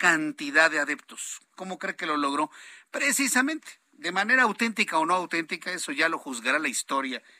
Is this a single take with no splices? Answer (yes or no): yes